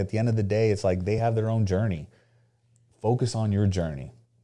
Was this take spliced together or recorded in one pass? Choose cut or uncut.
uncut